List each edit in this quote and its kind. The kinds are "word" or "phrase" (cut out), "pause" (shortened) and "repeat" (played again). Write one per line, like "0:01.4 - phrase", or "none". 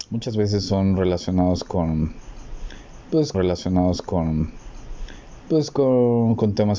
0:03.3 - repeat

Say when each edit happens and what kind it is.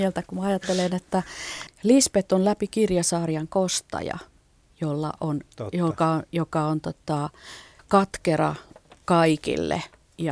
none

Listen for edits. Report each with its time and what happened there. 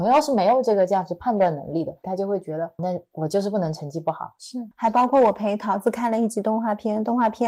0:02.0 - phrase
0:02.8 - word
0:04.7 - pause

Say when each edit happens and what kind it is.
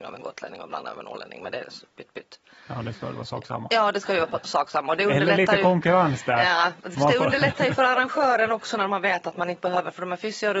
none

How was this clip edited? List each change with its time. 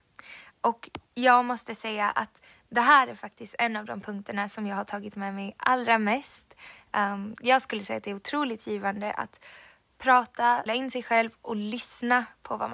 0:01.1 - pause
0:10.7 - word

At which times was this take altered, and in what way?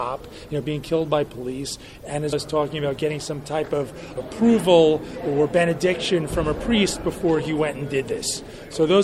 0:02.3 - word
0:04.2 - word

